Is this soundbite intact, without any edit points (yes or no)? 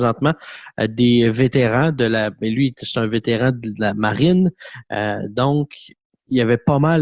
yes